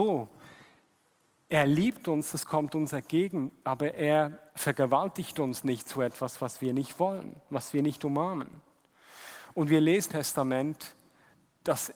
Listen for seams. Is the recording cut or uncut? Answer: cut